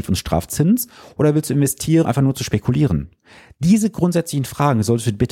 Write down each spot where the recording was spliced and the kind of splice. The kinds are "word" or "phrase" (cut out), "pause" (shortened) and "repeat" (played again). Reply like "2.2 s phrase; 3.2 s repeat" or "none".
2.0 s word